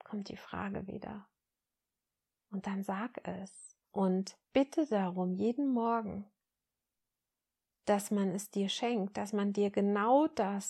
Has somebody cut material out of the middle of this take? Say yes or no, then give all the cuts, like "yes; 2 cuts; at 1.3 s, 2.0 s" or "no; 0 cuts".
yes; 1 cut; at 3.8 s